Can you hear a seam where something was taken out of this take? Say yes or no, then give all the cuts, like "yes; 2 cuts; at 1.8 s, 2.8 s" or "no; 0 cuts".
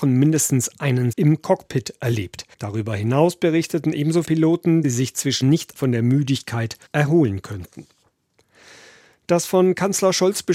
yes; 7 cuts; at 1.1 s, 2.5 s, 4.2 s, 4.8 s, 5.4 s, 5.8 s, 6.9 s